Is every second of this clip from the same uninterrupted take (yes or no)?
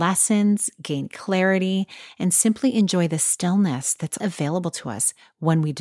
no